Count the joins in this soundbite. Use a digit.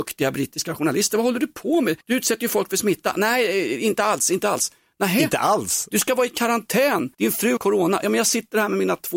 3